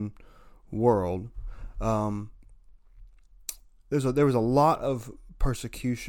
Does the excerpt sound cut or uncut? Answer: uncut